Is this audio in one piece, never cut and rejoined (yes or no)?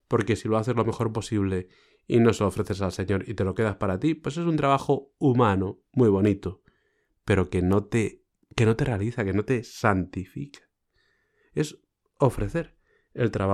yes